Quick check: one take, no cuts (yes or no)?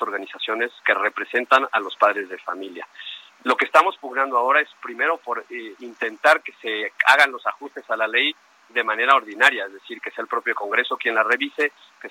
yes